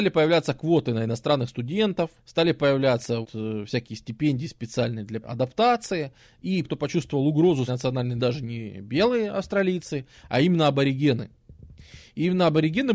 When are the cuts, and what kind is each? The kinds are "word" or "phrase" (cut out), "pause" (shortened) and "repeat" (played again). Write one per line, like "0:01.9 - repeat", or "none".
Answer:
0:02.2 - pause
0:03.2 - word
0:05.2 - phrase
0:06.6 - word
0:07.7 - word
0:08.2 - phrase

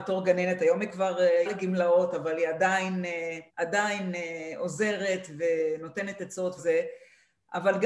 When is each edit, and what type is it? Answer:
0:01.4 - word
0:03.5 - pause
0:06.6 - word

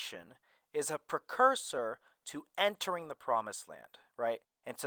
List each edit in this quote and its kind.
none

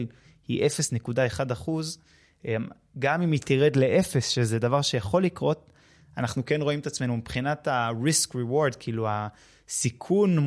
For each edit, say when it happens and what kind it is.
none

